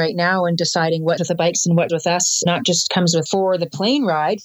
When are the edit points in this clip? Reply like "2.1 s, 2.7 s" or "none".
1.2 s, 1.9 s, 2.5 s, 3.3 s